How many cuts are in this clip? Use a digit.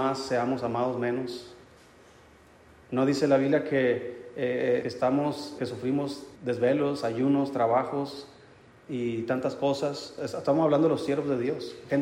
3